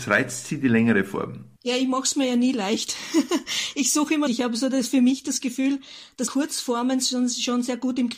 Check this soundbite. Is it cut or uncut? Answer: cut